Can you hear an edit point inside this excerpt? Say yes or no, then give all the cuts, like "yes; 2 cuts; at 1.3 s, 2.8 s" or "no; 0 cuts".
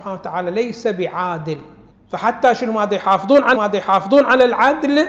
yes; 2 cuts; at 1.9 s, 3.6 s